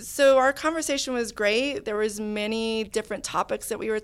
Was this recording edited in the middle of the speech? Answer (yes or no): no